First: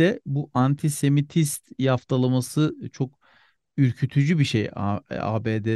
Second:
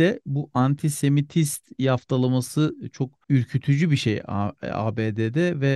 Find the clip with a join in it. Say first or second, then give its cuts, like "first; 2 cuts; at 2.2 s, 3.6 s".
second; 1 cut; at 3.2 s